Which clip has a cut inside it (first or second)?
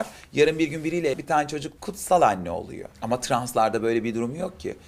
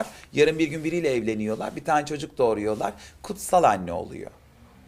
first